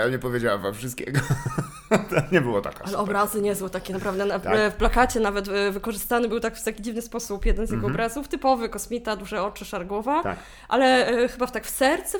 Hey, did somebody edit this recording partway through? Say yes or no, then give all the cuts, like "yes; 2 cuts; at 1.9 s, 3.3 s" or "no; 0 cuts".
no; 0 cuts